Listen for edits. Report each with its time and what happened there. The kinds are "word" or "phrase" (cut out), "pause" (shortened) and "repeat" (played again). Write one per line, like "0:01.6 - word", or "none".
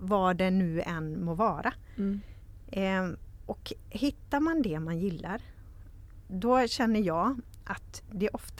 none